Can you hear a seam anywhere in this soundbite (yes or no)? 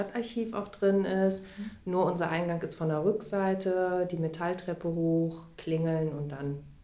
no